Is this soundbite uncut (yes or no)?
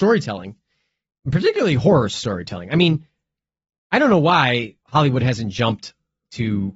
no